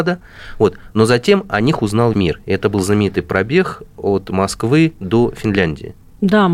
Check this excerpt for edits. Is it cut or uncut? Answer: cut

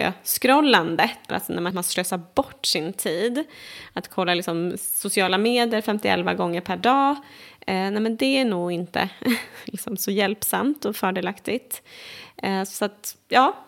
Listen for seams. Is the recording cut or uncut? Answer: cut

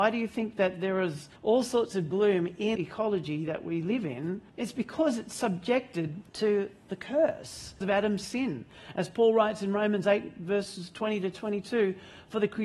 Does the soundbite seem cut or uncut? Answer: cut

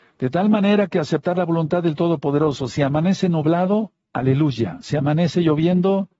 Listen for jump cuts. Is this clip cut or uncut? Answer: uncut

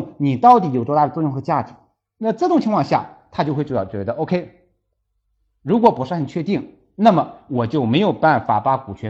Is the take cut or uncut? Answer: uncut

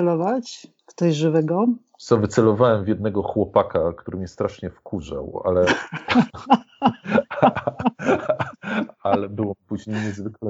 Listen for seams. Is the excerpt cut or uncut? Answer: uncut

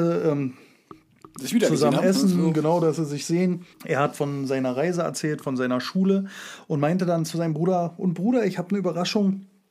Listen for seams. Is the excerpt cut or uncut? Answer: cut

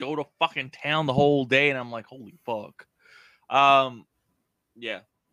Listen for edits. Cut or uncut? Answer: uncut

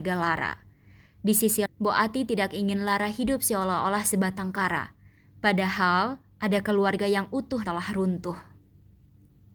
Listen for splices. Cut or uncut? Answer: cut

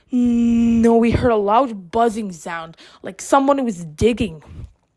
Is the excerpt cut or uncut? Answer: uncut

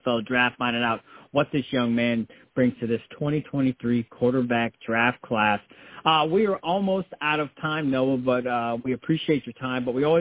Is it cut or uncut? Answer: uncut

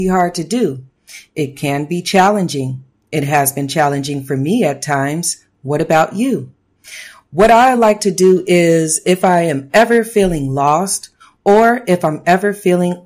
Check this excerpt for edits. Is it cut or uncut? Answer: uncut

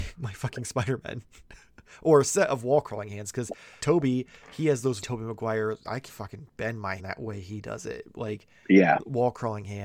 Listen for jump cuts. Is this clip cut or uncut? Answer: cut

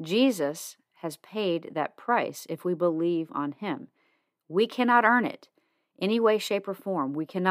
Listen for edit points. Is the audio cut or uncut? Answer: uncut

